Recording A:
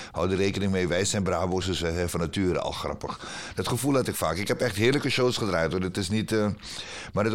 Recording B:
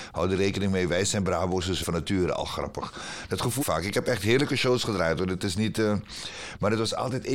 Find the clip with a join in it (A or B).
B